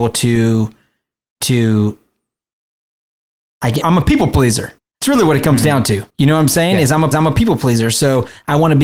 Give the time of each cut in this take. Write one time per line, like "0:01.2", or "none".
0:03.8
0:04.8
0:06.1
0:07.1